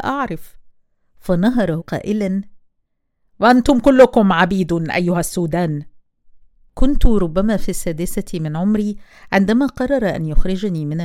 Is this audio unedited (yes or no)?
no